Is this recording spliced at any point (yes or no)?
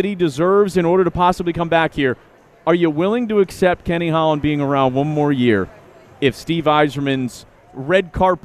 no